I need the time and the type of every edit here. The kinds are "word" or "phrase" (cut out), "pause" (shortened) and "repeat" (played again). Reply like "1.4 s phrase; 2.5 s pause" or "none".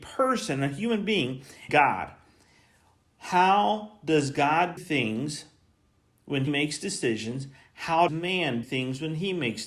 1.7 s word; 4.8 s word; 6.5 s word; 8.1 s word; 8.6 s word